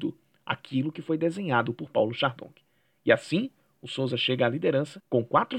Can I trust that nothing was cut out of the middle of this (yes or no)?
yes